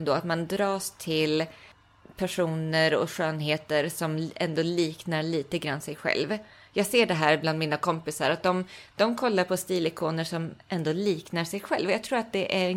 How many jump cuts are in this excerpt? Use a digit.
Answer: 0